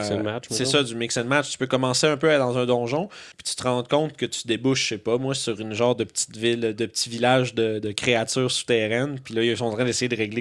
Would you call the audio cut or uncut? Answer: cut